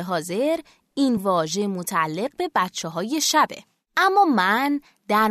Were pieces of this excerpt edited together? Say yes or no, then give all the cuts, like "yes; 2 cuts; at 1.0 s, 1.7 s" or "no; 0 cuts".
no; 0 cuts